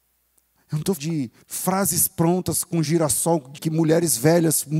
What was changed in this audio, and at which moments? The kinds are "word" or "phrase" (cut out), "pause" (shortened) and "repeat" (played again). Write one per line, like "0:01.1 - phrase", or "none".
0:01.0 - word
0:01.4 - pause
0:03.6 - word